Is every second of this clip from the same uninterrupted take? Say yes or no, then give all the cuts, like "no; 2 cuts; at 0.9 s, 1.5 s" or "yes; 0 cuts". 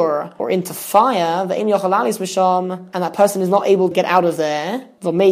no; 1 cut; at 3.9 s